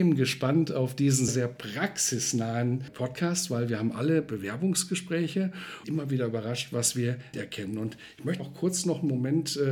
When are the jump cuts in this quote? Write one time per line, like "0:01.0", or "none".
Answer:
0:01.3
0:05.8
0:07.3
0:08.4